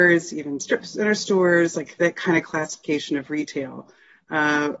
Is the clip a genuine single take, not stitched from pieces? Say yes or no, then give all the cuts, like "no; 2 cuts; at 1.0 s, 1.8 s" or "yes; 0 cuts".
yes; 0 cuts